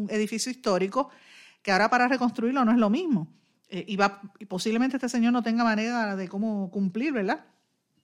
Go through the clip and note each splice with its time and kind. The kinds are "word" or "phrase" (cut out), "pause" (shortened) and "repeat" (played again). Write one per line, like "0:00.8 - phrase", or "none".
none